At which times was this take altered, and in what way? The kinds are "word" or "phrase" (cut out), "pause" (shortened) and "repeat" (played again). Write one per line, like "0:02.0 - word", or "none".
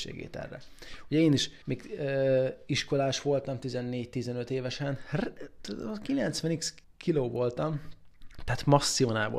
0:01.6 - pause
0:06.8 - pause

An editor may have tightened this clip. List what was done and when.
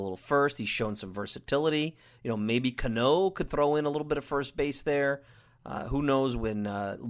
none

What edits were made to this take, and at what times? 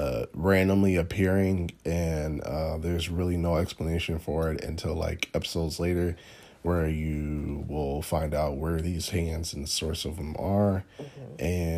none

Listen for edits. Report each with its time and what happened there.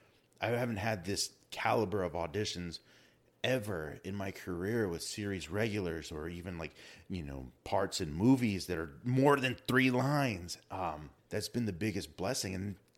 0:07.6 - pause
0:11.2 - pause

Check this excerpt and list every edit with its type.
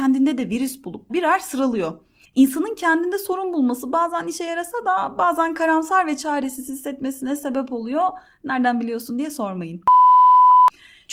0:01.1 - word

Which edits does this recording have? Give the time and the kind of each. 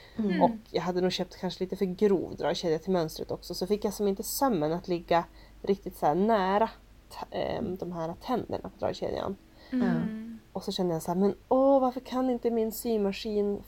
none

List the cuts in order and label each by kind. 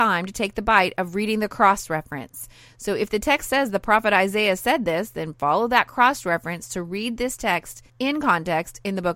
0:07.9 - pause

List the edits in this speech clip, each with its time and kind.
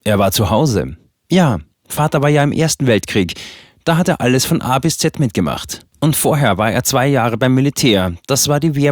none

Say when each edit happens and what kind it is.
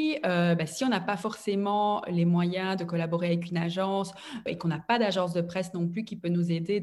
0:04.5 - word

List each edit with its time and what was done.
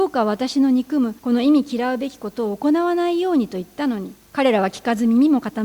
0:01.2 - pause
0:04.2 - pause

